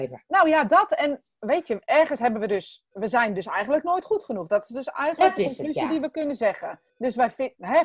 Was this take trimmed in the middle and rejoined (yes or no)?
yes